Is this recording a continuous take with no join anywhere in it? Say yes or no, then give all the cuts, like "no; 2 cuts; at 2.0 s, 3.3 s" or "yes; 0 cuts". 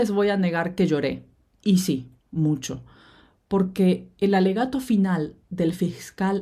yes; 0 cuts